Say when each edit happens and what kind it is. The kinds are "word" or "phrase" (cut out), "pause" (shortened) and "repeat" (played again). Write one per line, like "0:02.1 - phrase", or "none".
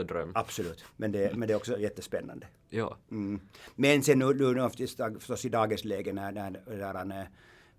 none